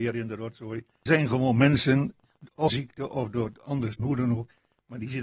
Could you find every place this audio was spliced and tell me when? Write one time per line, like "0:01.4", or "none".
0:01.1
0:02.7
0:04.0